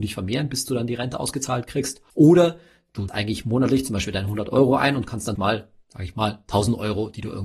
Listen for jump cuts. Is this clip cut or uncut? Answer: cut